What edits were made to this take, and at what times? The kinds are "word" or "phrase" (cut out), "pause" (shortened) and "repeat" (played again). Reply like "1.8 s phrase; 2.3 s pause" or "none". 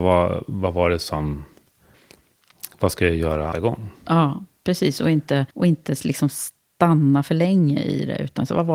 3.5 s phrase; 5.5 s pause